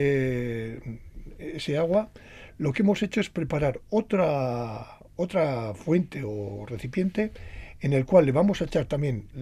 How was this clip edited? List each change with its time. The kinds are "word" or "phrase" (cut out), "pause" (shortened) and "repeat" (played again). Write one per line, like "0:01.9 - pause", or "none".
none